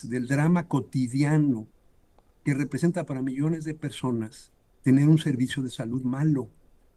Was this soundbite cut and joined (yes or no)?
no